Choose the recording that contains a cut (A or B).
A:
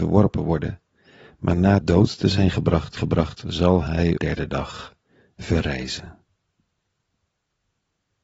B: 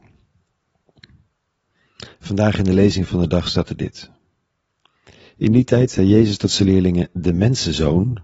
A